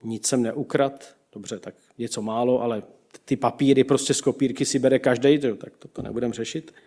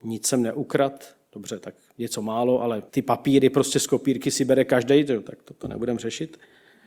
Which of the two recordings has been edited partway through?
second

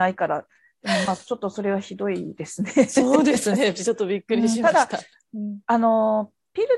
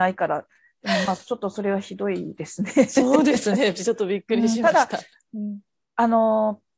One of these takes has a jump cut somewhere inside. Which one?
first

